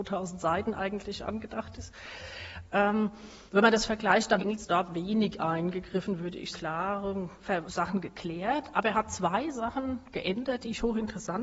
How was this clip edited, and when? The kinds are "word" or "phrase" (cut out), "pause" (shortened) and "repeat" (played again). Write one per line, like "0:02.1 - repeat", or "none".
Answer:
0:03.5 - pause
0:04.4 - phrase
0:06.5 - phrase
0:07.6 - word